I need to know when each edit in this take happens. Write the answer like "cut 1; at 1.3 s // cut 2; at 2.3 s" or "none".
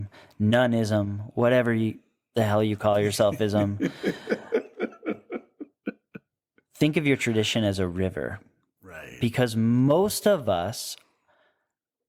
none